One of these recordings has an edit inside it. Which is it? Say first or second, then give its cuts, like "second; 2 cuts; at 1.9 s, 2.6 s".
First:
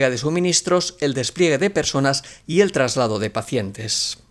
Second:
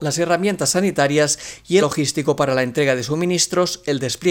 second; 1 cut; at 1.8 s